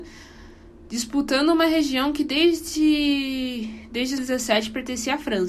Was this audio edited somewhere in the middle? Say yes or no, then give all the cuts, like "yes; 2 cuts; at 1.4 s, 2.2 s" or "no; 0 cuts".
yes; 1 cut; at 4.2 s